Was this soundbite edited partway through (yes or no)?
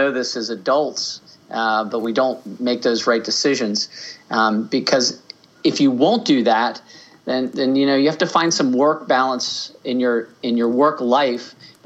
no